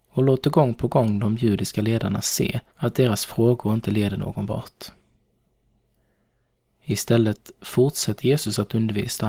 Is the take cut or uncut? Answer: cut